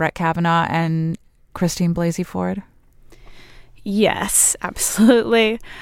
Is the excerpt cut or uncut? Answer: uncut